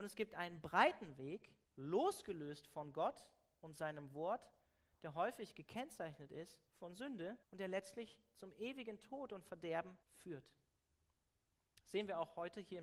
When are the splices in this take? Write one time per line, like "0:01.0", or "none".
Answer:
0:01.7
0:06.7
0:07.4
0:10.0